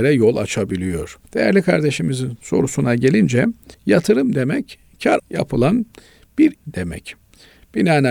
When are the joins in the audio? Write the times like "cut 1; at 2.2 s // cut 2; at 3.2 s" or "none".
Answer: cut 1; at 1.3 s // cut 2; at 3.7 s // cut 3; at 5.2 s // cut 4; at 6.5 s